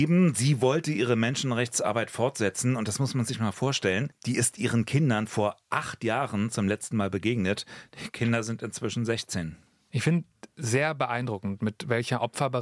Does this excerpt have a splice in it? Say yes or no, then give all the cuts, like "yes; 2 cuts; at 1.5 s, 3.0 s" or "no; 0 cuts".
no; 0 cuts